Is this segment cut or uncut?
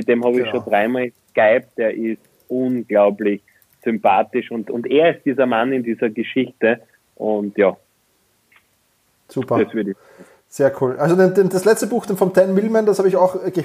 uncut